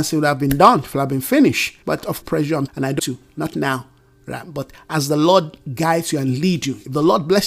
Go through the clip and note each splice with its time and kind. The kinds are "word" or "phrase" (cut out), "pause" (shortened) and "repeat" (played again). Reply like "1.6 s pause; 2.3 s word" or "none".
1.8 s pause; 2.2 s phrase; 2.7 s word; 3.0 s word